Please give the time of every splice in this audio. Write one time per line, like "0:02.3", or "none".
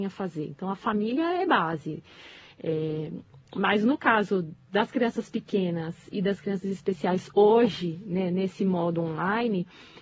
none

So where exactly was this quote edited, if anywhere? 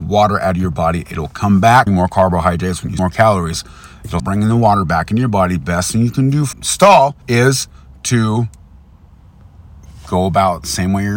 0:01.9
0:03.0
0:04.2
0:06.5
0:07.2

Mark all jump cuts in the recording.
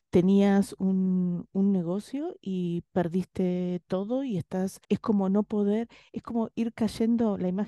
0:04.8

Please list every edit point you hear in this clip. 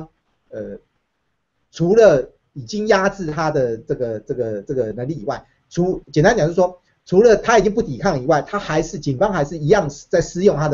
0:06.0

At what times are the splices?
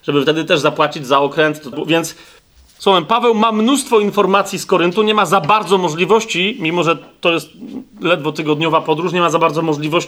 0:01.7

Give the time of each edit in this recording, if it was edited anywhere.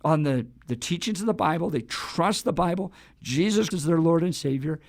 0:03.7

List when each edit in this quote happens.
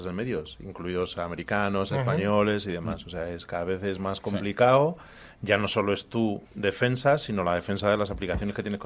0:06.5

